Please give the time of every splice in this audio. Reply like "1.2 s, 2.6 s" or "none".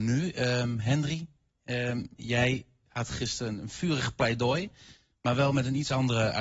none